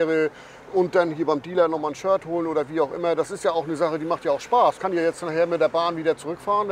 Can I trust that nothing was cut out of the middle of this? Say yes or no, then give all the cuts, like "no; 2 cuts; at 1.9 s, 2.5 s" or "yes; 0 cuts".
no; 1 cut; at 4.8 s